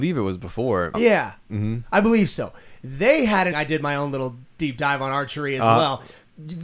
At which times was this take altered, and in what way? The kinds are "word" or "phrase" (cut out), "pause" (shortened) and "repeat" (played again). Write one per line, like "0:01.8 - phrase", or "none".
0:00.9 - word
0:03.5 - word